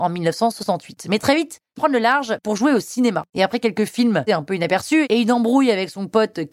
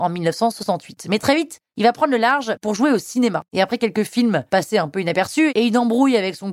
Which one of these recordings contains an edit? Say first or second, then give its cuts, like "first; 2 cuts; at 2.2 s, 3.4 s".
first; 2 cuts; at 1.8 s, 4.3 s